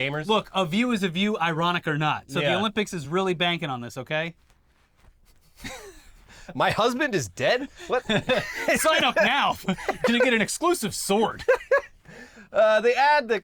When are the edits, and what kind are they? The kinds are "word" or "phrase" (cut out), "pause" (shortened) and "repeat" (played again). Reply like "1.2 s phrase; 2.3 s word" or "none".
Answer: none